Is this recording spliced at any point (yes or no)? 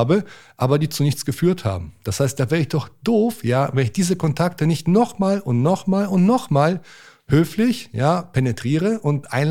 no